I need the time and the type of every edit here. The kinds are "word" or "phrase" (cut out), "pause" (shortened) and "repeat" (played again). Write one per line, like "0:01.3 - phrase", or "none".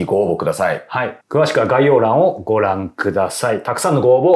0:01.2 - pause